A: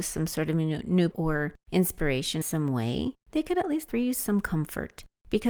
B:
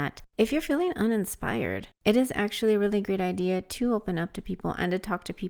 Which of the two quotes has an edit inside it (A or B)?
A